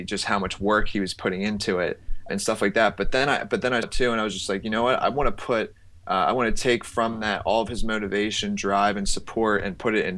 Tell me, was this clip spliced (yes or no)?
yes